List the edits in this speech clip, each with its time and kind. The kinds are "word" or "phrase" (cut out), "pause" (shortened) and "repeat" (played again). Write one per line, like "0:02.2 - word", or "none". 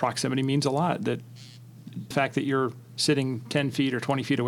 0:02.1 - word